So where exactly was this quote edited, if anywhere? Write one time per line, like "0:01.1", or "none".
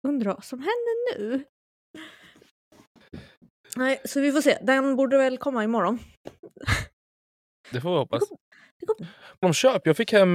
0:09.0
0:09.4